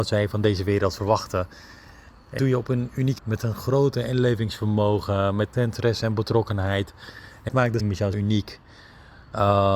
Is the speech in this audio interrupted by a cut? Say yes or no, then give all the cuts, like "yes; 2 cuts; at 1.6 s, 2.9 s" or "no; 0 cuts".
yes; 6 cuts; at 2.4 s, 3.2 s, 5.5 s, 7.5 s, 7.8 s, 8.1 s